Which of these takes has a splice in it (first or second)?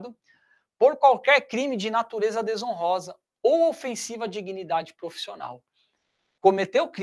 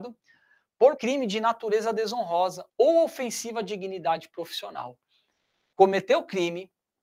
second